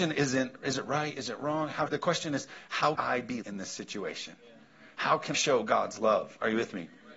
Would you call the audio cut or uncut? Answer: cut